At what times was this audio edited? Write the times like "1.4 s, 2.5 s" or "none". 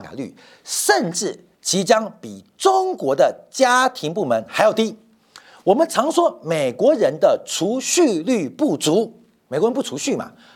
1.5 s